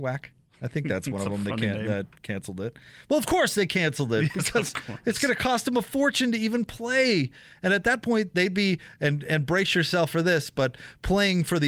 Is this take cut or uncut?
uncut